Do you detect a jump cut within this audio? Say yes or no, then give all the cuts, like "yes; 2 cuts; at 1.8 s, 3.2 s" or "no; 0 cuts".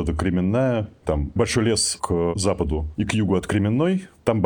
no; 0 cuts